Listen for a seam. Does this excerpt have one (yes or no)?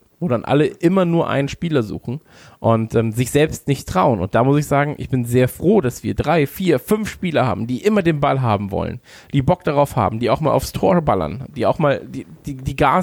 no